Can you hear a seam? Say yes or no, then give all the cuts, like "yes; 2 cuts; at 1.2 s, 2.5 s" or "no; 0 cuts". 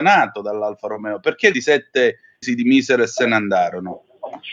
yes; 2 cuts; at 1.5 s, 2.4 s